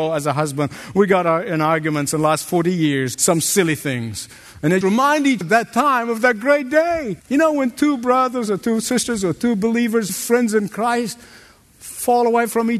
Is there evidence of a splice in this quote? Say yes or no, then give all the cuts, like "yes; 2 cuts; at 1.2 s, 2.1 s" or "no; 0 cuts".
yes; 5 cuts; at 3.1 s, 4.8 s, 5.4 s, 7.2 s, 10.1 s